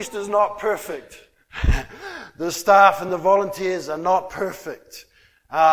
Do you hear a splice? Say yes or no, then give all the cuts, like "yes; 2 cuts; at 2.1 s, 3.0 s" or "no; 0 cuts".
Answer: no; 0 cuts